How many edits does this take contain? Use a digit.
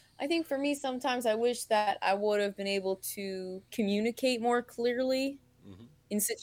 1